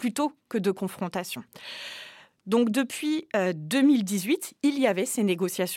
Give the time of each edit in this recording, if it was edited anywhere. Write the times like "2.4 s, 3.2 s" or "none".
none